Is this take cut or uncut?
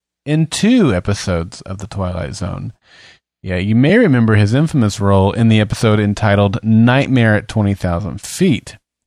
uncut